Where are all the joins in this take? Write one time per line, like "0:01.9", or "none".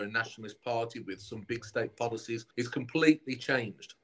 0:02.5